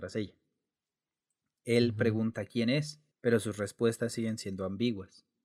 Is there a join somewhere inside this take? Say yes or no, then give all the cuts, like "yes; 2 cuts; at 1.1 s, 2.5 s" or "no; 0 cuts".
yes; 1 cut; at 3.1 s